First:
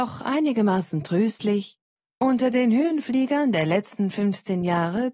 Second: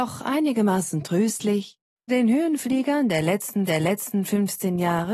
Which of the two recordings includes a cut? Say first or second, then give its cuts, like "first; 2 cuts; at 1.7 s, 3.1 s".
second; 2 cuts; at 2.1 s, 3.7 s